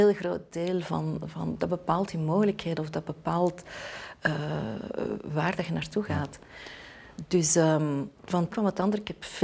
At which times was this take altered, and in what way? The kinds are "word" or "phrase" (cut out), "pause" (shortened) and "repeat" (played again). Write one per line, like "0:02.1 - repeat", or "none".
0:08.1 - pause
0:08.5 - word